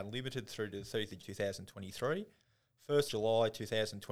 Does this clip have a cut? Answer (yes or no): yes